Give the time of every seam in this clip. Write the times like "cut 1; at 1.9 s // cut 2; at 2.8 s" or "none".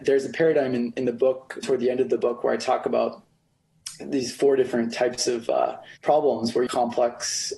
cut 1; at 1.6 s // cut 2; at 6.0 s // cut 3; at 6.7 s